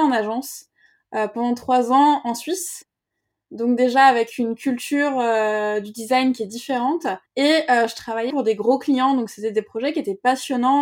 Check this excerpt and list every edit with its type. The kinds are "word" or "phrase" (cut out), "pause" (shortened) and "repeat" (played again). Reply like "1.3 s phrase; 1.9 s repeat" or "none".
7.3 s pause; 8.3 s word